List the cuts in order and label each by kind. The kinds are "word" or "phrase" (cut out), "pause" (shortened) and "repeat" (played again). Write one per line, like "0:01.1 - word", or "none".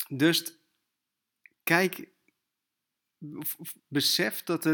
0:03.8 - pause